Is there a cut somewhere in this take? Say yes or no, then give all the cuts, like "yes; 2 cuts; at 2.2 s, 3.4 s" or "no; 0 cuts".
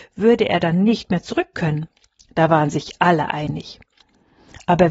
no; 0 cuts